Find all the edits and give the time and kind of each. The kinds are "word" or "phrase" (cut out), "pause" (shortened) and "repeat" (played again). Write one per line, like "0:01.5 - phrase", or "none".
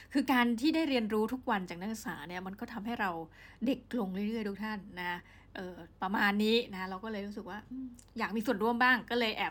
0:05.9 - pause